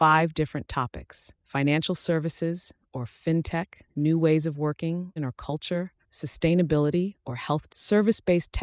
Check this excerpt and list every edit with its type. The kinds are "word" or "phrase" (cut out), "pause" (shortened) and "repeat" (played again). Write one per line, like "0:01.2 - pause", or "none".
0:01.4 - pause
0:03.9 - pause
0:05.2 - phrase
0:06.0 - pause
0:07.7 - word